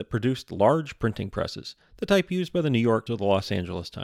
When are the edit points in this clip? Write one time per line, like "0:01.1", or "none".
0:03.1

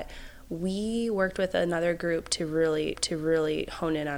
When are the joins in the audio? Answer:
0:02.9

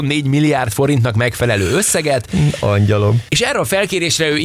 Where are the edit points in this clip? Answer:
none

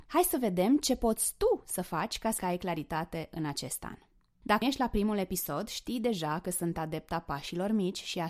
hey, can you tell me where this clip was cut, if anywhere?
0:02.4
0:04.6

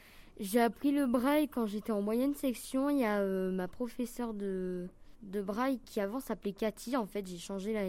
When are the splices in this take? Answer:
0:05.1

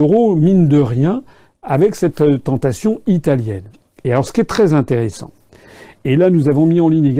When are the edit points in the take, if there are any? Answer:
none

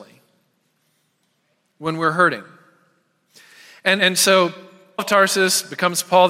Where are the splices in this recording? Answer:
0:04.0
0:05.0

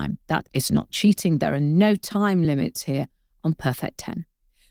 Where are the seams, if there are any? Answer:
none

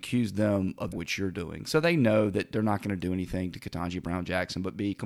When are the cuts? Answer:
0:00.9

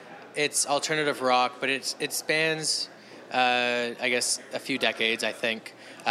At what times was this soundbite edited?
none

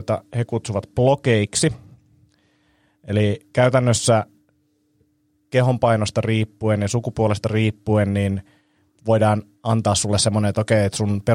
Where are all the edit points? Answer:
none

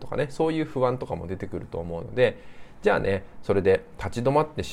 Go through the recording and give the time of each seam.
none

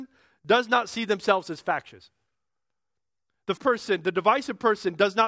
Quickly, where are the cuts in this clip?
0:03.6

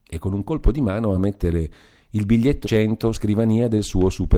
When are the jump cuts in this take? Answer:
0:01.1
0:02.6
0:03.1

